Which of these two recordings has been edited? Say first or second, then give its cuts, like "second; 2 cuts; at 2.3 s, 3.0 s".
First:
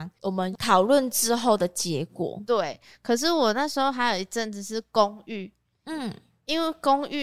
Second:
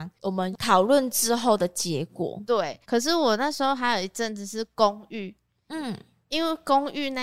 second; 1 cut; at 2.8 s